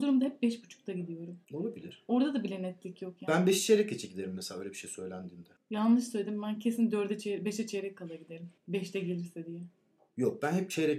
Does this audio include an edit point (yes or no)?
yes